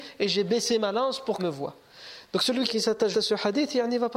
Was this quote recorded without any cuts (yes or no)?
no